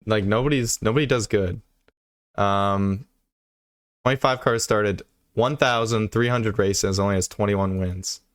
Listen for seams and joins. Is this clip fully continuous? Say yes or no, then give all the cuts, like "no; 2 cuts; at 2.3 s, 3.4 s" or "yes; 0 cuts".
yes; 0 cuts